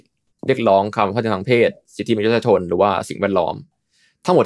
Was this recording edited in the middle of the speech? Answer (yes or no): no